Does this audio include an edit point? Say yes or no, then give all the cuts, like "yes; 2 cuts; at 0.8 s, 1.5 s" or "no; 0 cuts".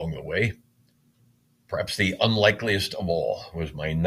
no; 0 cuts